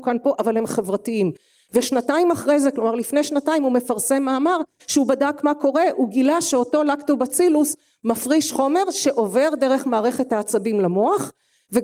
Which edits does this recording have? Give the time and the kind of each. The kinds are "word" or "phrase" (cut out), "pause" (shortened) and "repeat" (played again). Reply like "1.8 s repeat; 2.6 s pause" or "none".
none